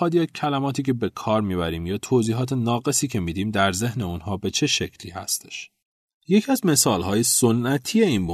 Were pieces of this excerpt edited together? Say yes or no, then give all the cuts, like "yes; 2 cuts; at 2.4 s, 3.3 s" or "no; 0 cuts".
no; 0 cuts